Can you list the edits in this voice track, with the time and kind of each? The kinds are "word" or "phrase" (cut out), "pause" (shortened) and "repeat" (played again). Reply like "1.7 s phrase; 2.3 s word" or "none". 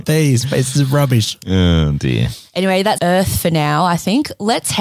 3.0 s word